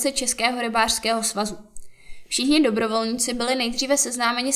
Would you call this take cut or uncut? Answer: uncut